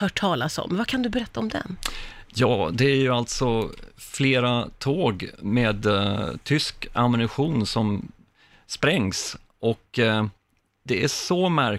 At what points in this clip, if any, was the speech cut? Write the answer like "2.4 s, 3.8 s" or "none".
none